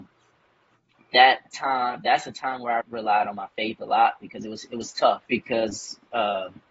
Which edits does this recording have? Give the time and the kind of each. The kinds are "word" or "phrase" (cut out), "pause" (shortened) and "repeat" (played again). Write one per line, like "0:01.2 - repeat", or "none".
0:02.8 - word
0:05.3 - pause